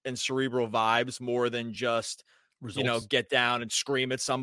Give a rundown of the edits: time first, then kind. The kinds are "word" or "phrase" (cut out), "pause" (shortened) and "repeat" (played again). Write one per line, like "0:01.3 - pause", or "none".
none